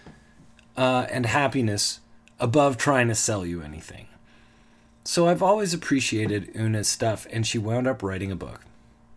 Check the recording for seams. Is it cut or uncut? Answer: uncut